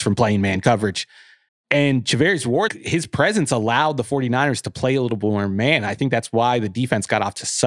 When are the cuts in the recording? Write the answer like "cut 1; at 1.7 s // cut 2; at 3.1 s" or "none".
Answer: cut 1; at 1.5 s // cut 2; at 2.7 s